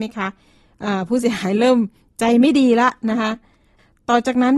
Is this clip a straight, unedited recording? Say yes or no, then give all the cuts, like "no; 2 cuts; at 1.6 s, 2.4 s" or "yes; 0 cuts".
yes; 0 cuts